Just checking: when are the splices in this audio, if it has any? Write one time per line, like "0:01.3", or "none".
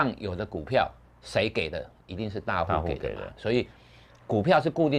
none